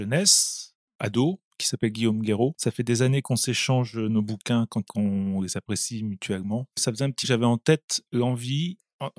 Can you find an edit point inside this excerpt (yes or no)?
yes